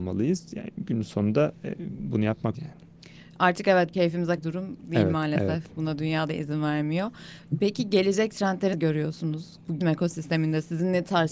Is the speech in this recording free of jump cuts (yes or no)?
no